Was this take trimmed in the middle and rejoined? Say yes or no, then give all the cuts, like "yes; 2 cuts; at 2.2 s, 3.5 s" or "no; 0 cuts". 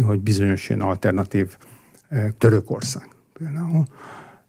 yes; 1 cut; at 2.3 s